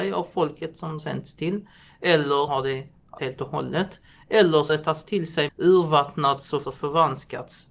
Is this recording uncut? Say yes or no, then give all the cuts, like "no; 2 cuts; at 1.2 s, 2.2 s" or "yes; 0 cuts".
no; 7 cuts; at 1.0 s, 2.5 s, 3.2 s, 4.7 s, 5.0 s, 5.5 s, 6.6 s